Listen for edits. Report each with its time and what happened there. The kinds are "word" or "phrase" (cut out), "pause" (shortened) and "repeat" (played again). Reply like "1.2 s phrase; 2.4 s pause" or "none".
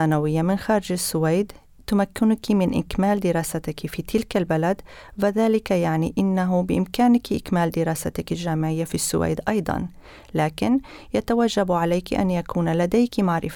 none